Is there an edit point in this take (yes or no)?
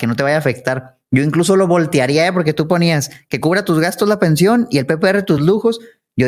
no